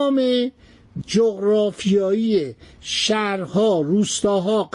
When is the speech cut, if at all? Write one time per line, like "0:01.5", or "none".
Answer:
0:01.0